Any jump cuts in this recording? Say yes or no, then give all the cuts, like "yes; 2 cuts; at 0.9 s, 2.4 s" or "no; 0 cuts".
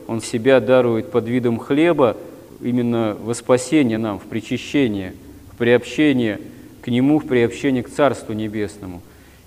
no; 0 cuts